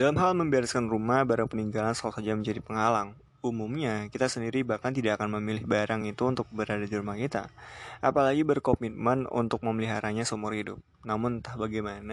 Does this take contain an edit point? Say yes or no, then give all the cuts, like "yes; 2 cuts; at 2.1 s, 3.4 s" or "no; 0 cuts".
no; 0 cuts